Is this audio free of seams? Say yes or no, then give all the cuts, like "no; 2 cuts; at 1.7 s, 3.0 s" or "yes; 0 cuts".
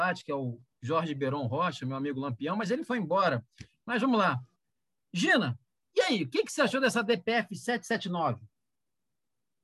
yes; 0 cuts